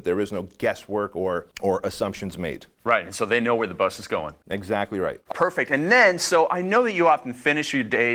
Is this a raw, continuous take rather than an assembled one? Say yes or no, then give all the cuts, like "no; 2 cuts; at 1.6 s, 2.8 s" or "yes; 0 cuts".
no; 2 cuts; at 1.5 s, 5.3 s